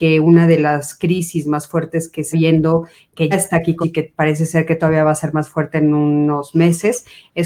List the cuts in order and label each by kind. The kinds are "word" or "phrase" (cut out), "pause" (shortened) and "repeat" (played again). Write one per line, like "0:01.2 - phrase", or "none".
0:02.3 - word
0:03.3 - word
0:03.8 - word